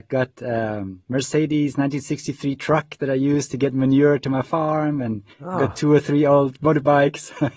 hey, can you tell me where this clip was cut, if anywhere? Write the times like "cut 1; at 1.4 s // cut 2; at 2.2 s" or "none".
cut 1; at 5.3 s